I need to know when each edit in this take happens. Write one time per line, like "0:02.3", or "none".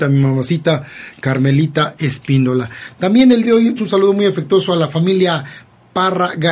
0:03.4
0:03.8

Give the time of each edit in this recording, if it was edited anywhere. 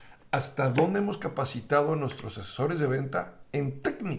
none

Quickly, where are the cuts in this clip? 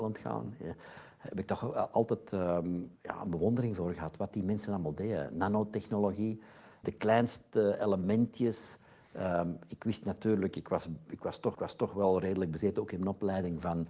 0:03.0
0:06.8
0:11.5

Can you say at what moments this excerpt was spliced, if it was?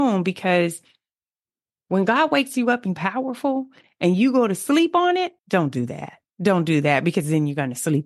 0:03.0
0:05.4
0:06.3

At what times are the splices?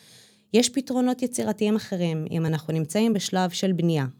none

